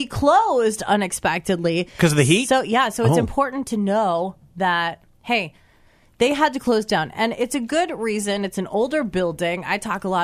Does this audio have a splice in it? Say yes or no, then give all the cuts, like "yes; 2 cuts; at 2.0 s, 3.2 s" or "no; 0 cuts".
no; 0 cuts